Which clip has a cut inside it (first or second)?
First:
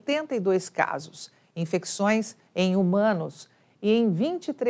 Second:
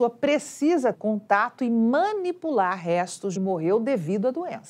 second